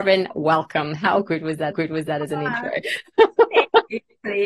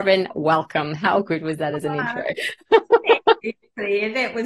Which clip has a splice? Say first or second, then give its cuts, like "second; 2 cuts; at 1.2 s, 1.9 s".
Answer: first; 1 cut; at 1.7 s